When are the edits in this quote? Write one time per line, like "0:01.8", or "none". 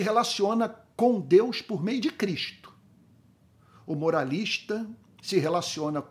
none